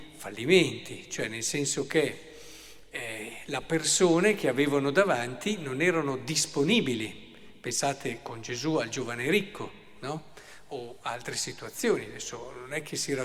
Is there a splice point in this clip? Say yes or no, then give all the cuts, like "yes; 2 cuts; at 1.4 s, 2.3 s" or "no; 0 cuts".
no; 0 cuts